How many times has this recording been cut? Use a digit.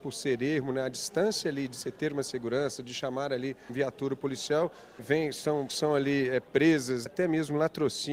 4